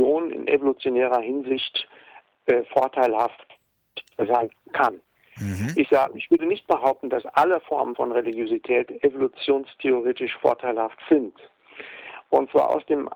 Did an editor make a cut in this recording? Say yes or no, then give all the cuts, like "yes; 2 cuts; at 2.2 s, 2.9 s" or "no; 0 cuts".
no; 0 cuts